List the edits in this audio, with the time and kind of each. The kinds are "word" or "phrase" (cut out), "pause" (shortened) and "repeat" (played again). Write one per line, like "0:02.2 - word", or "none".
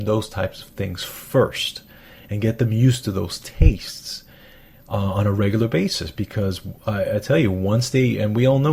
none